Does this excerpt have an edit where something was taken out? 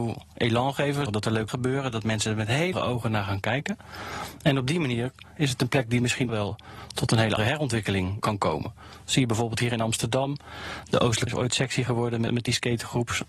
yes; 8 cuts; at 1.1 s, 1.5 s, 2.7 s, 6.3 s, 7.4 s, 8.2 s, 11.3 s, 12.3 s

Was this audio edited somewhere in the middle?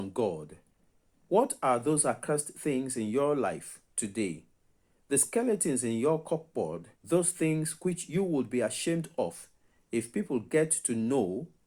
yes; 1 cut; at 7.0 s

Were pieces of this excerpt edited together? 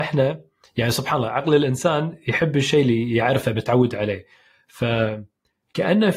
no; 0 cuts

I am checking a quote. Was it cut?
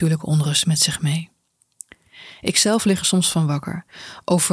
no; 0 cuts

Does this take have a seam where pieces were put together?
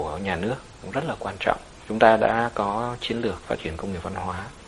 no; 0 cuts

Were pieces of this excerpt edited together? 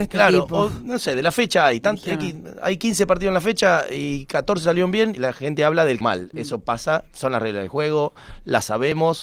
yes; 2 cuts; at 5.2 s, 6.0 s

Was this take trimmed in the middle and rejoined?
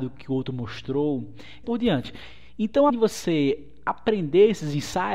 yes; 2 cuts; at 1.6 s, 2.9 s

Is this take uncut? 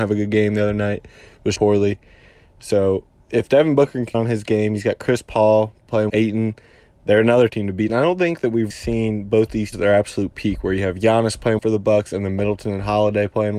no; 7 cuts; at 1.6 s, 4.1 s, 6.1 s, 7.5 s, 8.7 s, 9.7 s, 11.6 s

